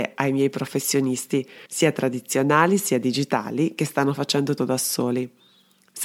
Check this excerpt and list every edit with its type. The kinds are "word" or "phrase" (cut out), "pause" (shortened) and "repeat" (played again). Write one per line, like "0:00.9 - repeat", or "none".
0:01.7 - pause
0:04.6 - word